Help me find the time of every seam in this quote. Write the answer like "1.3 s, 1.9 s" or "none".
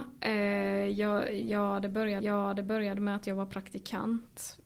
2.2 s